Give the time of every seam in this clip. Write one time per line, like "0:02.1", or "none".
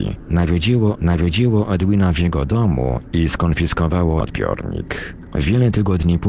0:01.0
0:04.2